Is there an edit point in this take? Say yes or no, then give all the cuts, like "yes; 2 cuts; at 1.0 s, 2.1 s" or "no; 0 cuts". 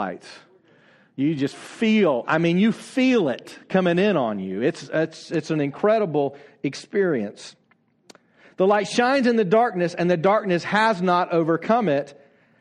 no; 0 cuts